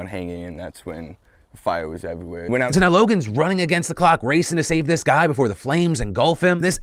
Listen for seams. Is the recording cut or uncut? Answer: uncut